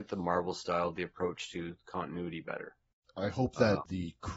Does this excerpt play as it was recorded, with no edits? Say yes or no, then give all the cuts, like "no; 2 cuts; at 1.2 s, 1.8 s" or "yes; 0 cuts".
yes; 0 cuts